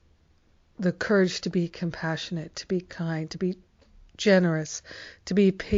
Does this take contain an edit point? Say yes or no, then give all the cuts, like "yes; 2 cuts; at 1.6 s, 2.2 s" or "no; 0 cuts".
no; 0 cuts